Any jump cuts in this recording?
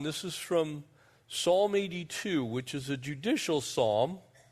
no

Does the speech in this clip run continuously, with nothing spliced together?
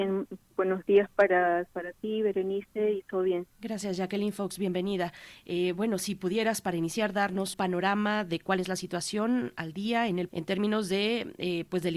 no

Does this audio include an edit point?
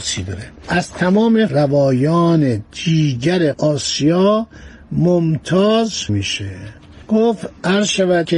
yes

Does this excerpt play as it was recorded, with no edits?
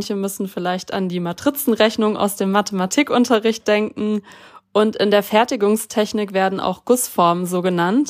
yes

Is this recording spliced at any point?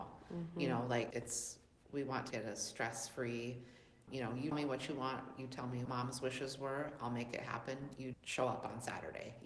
yes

